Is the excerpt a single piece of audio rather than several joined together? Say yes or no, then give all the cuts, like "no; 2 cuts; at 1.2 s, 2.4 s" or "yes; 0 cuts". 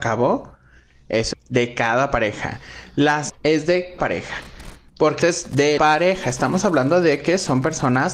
no; 5 cuts; at 1.3 s, 3.3 s, 4.0 s, 5.2 s, 5.8 s